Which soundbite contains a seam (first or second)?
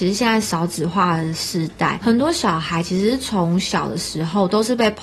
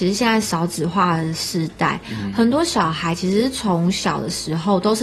first